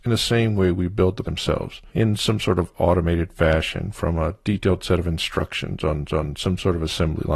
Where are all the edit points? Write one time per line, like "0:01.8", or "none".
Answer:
0:01.2
0:01.9
0:06.1